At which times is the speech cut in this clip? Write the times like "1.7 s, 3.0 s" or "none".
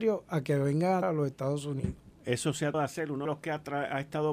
1.0 s, 2.7 s, 3.3 s